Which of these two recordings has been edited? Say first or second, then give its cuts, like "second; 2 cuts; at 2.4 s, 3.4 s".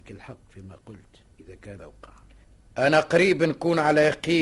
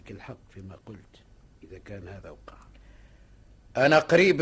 first; 3 cuts; at 1.3 s, 1.8 s, 2.4 s